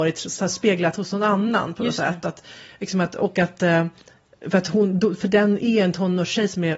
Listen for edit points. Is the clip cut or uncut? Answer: uncut